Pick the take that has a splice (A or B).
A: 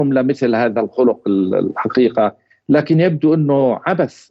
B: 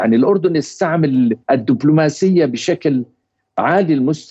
B